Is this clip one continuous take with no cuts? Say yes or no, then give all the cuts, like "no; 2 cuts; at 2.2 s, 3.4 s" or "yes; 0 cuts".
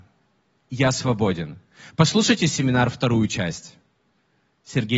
yes; 0 cuts